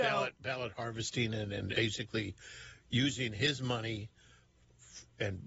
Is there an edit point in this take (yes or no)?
yes